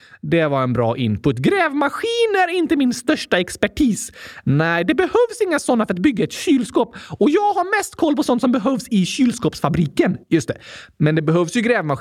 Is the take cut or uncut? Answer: cut